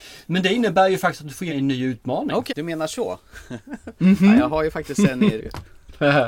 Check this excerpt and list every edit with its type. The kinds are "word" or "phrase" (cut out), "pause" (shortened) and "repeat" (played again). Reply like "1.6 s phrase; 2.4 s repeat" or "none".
1.5 s word; 2.5 s word; 5.4 s word